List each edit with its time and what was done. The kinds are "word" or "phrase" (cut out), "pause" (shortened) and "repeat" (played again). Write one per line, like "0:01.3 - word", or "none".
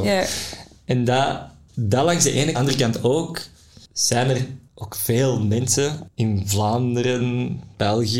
0:02.5 - phrase

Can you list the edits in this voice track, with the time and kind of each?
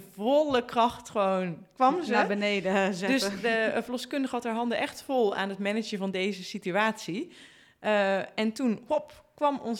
none

